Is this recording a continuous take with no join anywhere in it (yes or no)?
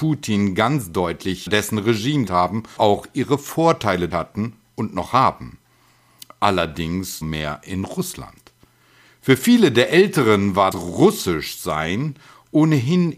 no